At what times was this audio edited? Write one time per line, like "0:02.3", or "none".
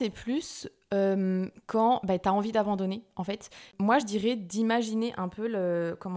none